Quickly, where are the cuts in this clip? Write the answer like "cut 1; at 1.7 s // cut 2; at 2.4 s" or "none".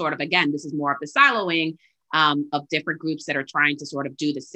none